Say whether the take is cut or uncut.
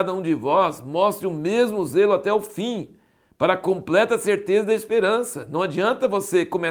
uncut